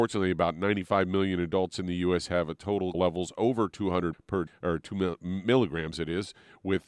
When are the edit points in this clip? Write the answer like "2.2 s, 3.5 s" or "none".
2.9 s, 4.1 s, 4.5 s